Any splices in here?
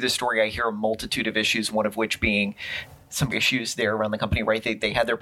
yes; 1 cut; at 3.3 s

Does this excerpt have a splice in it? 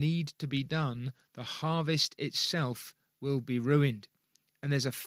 no; 0 cuts

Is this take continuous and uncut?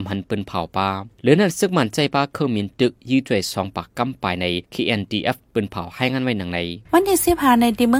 no; 3 cuts; at 1.1 s, 4.6 s, 6.8 s

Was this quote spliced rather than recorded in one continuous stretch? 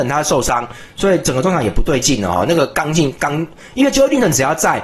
no; 0 cuts

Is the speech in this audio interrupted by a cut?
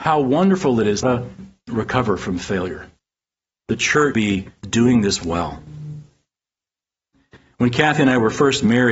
yes; 3 cuts; at 1.0 s, 4.1 s, 4.6 s

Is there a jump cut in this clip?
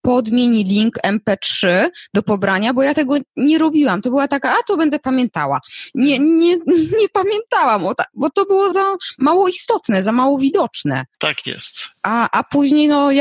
yes; 2 cuts; at 8.7 s, 11.1 s

